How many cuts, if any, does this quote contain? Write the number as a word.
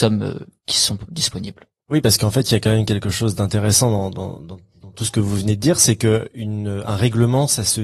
zero